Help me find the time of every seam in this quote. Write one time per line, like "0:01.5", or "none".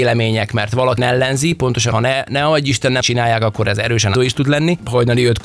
0:01.0
0:01.9
0:03.0
0:04.1